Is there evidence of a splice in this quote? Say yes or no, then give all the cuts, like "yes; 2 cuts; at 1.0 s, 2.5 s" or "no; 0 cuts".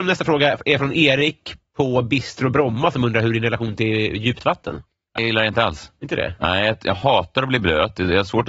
yes; 1 cut; at 5.2 s